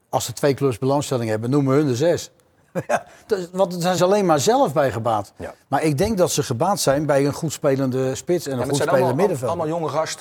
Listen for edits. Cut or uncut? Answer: cut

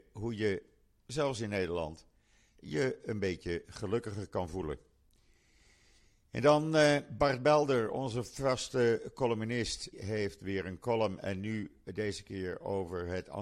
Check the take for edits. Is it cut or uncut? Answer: cut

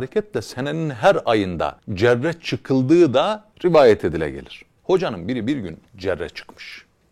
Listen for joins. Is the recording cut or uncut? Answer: cut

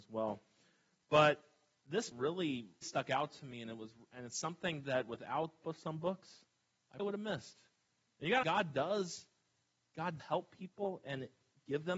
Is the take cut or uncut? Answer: cut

